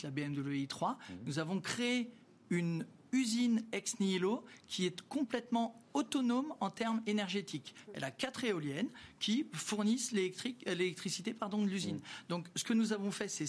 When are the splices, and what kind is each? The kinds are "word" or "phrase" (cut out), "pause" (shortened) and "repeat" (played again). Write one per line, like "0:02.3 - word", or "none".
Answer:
none